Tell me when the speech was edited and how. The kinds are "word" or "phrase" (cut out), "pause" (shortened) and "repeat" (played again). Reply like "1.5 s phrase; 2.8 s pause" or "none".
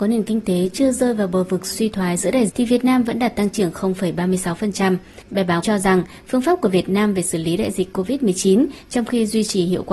2.5 s word; 5.6 s word